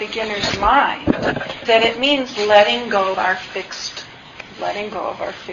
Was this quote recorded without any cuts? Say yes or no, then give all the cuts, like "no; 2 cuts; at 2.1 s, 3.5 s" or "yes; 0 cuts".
no; 3 cuts; at 1.6 s, 3.1 s, 4.5 s